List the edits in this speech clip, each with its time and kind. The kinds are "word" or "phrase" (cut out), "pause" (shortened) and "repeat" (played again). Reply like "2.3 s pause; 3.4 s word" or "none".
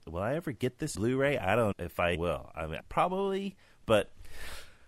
0.9 s word; 1.7 s word; 2.1 s word; 2.8 s word